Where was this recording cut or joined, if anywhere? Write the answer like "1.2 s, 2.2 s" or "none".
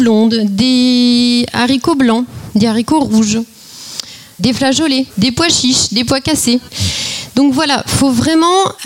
none